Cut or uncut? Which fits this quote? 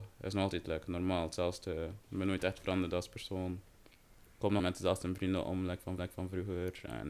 cut